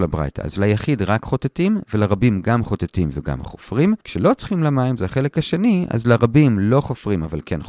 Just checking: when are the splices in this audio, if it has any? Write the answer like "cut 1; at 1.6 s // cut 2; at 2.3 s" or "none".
cut 1; at 4.0 s

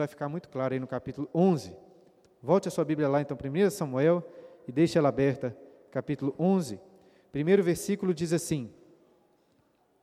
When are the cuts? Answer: none

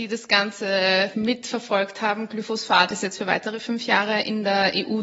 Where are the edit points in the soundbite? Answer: cut 1; at 1.1 s

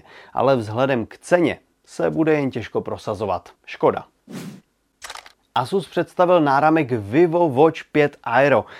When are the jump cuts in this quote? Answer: cut 1; at 3.6 s

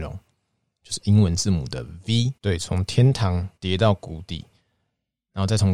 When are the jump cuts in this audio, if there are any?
cut 1; at 2.4 s // cut 2; at 3.6 s

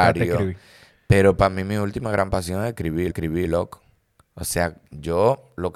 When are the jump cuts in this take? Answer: cut 1; at 3.1 s

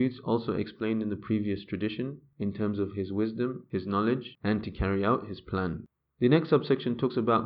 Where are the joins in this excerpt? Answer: none

